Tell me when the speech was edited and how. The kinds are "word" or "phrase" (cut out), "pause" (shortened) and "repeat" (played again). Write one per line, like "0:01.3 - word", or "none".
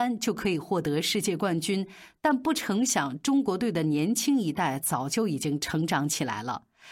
none